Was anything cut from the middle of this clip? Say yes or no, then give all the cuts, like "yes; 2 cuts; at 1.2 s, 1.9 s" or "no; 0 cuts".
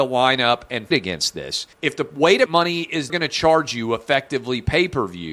yes; 4 cuts; at 0.9 s, 1.7 s, 2.5 s, 3.1 s